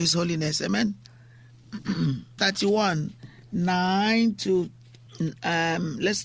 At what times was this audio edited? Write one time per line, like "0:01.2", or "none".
0:02.4